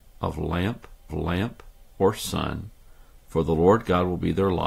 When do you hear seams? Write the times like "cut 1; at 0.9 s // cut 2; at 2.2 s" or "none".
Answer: cut 1; at 1.1 s